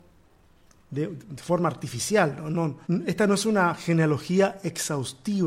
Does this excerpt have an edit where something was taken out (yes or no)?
yes